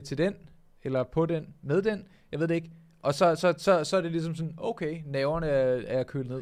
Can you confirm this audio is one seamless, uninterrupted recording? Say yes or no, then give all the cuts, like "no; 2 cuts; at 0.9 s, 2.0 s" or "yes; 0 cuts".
yes; 0 cuts